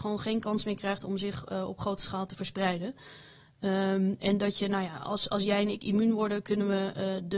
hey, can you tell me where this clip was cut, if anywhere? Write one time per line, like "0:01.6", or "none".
none